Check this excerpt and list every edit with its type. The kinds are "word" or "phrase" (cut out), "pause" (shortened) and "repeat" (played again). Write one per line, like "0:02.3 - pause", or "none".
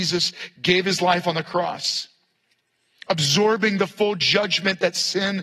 none